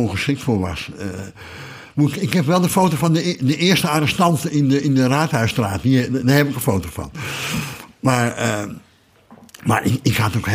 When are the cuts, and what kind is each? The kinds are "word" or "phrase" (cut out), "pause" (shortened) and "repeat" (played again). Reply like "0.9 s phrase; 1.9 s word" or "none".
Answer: none